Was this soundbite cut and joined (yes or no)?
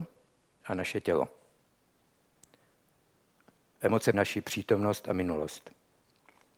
yes